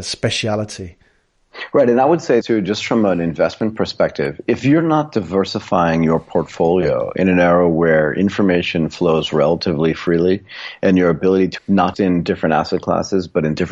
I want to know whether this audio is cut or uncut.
cut